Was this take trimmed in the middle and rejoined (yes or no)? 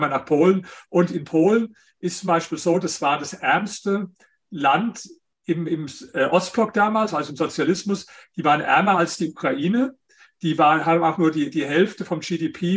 no